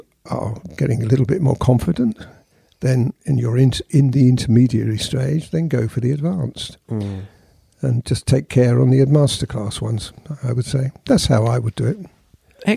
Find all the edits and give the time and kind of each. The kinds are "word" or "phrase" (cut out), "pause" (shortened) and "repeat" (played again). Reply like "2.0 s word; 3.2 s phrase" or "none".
none